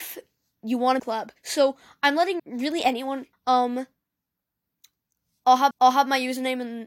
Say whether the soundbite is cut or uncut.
cut